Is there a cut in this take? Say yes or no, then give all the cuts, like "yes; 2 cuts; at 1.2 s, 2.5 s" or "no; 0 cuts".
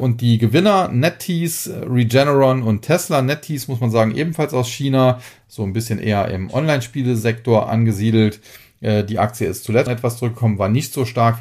yes; 1 cut; at 9.9 s